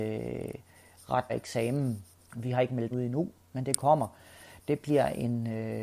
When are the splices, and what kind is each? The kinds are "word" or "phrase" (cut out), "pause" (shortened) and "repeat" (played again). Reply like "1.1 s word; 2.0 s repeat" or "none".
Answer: 1.3 s word; 2.9 s word